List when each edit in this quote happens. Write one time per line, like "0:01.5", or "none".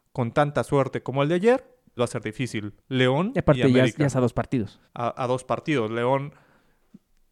0:02.0
0:02.8
0:04.8